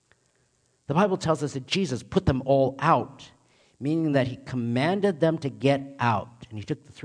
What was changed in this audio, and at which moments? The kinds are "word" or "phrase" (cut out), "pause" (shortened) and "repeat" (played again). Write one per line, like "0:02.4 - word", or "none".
none